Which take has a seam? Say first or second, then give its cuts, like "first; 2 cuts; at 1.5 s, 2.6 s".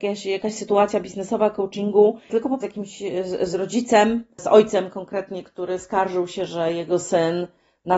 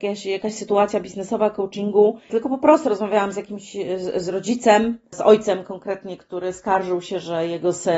first; 1 cut; at 2.6 s